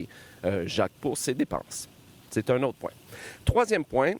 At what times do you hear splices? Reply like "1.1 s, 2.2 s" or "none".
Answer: 0.9 s